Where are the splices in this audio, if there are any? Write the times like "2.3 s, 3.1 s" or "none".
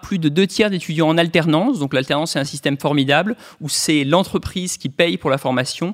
none